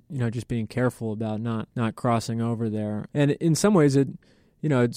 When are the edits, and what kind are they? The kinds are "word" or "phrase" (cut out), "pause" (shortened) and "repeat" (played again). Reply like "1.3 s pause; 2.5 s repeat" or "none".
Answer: 1.7 s pause; 3.1 s pause